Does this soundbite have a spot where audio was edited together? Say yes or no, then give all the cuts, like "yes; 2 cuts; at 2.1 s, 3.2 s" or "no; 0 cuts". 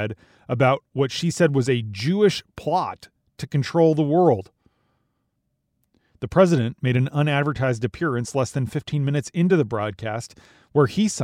no; 0 cuts